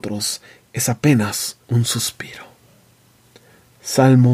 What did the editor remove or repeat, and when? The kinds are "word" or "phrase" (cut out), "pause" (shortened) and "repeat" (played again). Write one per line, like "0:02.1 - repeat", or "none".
0:01.6 - pause